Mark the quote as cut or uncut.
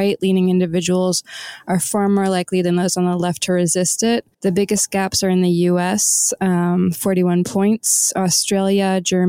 cut